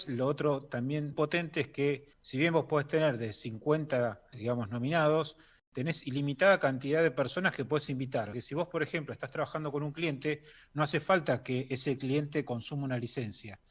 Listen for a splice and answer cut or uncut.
cut